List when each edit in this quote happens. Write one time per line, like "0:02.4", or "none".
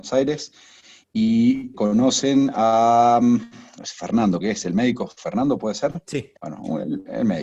0:01.7
0:03.8
0:04.4
0:06.4